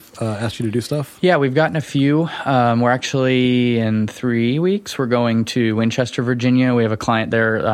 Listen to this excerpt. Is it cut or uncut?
uncut